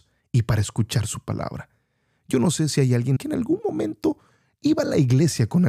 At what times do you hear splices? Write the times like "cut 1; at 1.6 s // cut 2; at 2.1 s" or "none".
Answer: cut 1; at 3.2 s